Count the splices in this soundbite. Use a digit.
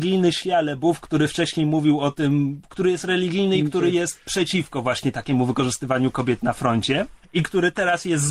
1